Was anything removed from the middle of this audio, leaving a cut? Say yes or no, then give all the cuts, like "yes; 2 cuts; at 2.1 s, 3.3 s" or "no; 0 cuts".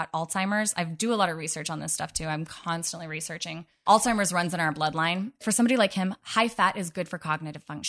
no; 0 cuts